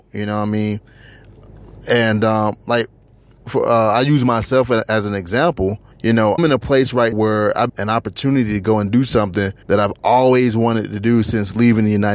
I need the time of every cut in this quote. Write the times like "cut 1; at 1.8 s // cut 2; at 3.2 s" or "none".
cut 1; at 3.4 s // cut 2; at 5.9 s // cut 3; at 6.4 s // cut 4; at 7.1 s // cut 5; at 7.7 s // cut 6; at 9.6 s